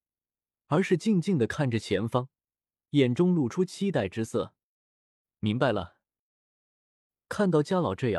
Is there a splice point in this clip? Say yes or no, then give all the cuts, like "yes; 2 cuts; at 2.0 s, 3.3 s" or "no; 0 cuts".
no; 0 cuts